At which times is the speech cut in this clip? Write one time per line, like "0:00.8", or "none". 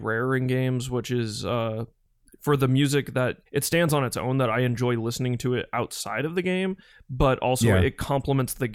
0:03.5